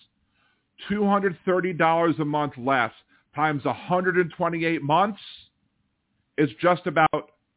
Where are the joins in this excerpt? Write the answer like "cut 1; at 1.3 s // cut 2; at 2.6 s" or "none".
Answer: none

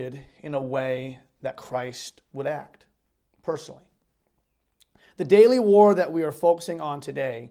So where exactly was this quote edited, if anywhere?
none

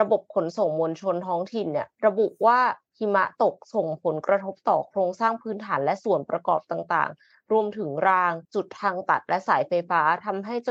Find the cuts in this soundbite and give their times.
cut 1; at 2.0 s // cut 2; at 8.4 s

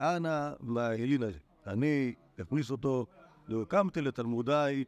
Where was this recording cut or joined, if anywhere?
none

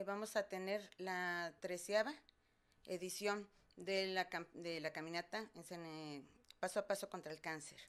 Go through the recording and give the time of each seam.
none

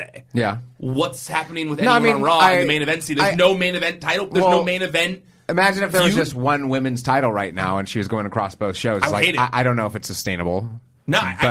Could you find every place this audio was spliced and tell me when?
none

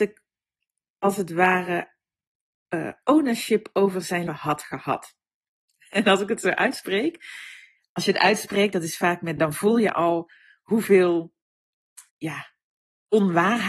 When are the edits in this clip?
cut 1; at 4.3 s // cut 2; at 9.4 s // cut 3; at 12.1 s

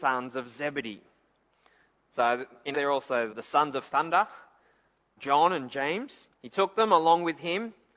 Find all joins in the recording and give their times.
cut 1; at 2.7 s // cut 2; at 3.3 s // cut 3; at 5.2 s // cut 4; at 6.3 s

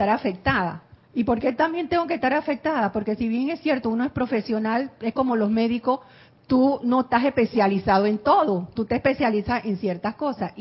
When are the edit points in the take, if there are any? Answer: cut 1; at 1.0 s

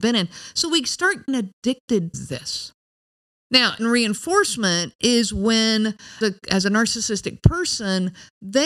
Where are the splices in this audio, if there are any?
cut 1; at 1.3 s // cut 2; at 2.1 s // cut 3; at 3.8 s // cut 4; at 6.2 s

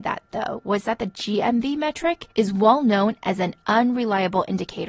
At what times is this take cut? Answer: cut 1; at 2.3 s

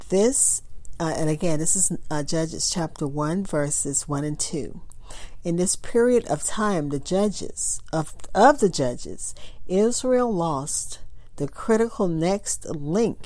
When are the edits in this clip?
none

